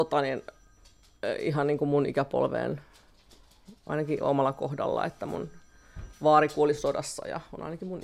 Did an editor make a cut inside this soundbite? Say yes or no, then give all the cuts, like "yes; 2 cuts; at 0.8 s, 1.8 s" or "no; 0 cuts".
no; 0 cuts